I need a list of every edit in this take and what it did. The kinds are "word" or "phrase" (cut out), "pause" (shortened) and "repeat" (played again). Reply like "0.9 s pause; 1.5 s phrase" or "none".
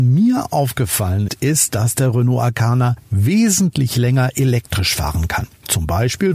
1.3 s word